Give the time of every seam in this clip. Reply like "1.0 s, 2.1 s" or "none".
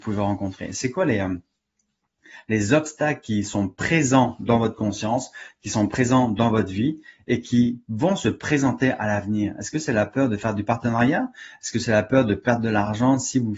none